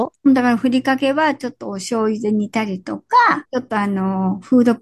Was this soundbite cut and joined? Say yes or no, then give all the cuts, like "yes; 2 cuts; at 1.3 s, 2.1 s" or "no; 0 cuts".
yes; 1 cut; at 3.4 s